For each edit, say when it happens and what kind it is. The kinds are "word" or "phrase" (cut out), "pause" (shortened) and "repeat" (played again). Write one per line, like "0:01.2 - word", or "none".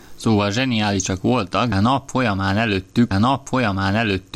0:01.7 - word
0:03.1 - repeat